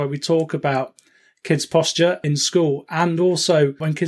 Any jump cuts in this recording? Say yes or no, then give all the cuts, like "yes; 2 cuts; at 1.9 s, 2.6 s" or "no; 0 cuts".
no; 0 cuts